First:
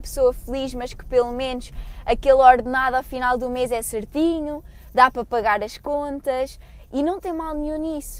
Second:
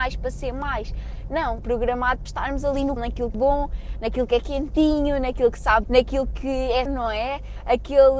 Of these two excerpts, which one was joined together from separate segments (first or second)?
second